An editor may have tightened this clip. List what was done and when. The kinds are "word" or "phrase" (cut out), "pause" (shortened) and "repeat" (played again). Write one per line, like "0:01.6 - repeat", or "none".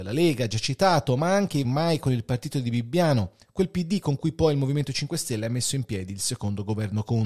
0:01.6 - word